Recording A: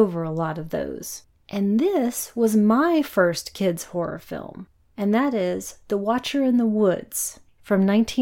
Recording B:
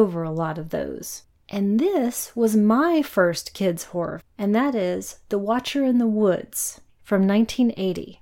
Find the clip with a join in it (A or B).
B